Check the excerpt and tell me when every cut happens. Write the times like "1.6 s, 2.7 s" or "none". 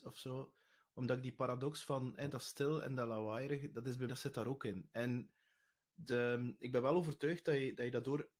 4.1 s